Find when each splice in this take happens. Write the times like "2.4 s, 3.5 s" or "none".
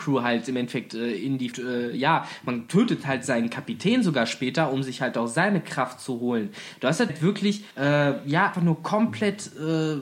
1.5 s, 7.1 s, 7.7 s, 8.5 s